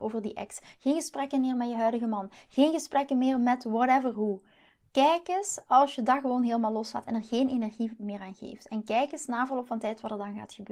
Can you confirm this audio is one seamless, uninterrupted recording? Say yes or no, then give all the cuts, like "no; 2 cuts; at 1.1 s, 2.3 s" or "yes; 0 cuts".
yes; 0 cuts